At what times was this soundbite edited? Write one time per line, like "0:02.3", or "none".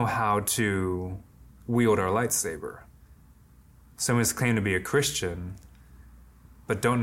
none